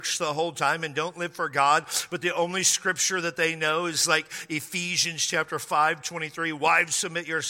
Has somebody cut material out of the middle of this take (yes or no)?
no